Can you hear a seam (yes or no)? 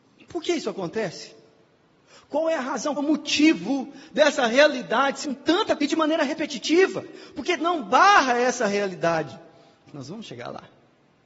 yes